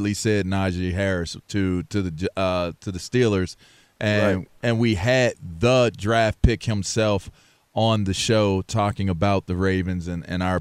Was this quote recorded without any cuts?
yes; 0 cuts

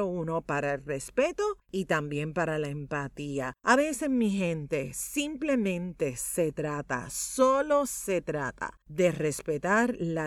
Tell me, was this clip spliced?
yes; 3 cuts; at 1.6 s, 3.6 s, 8.8 s

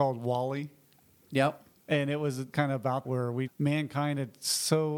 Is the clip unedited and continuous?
no; 3 cuts; at 2.5 s, 3.0 s, 3.5 s

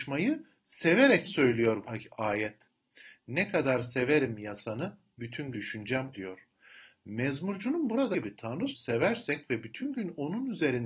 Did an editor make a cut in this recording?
yes; 6 cuts; at 1.2 s, 1.8 s, 5.5 s, 6.1 s, 8.1 s, 8.7 s

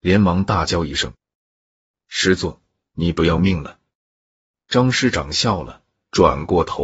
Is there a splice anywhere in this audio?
no; 0 cuts

